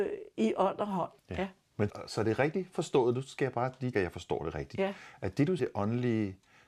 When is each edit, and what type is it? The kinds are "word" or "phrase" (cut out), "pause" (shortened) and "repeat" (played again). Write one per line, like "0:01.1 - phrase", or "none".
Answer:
0:01.2 - pause
0:01.9 - word
0:03.9 - word
0:05.6 - phrase